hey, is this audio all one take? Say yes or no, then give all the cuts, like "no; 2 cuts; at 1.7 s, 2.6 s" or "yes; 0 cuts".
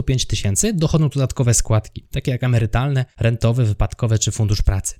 yes; 0 cuts